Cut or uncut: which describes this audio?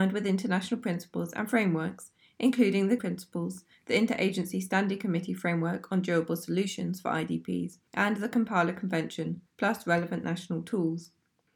cut